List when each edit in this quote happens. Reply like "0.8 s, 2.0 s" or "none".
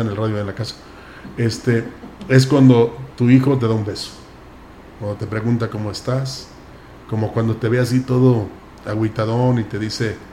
none